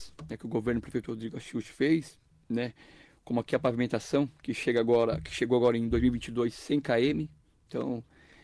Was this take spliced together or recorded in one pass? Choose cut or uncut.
uncut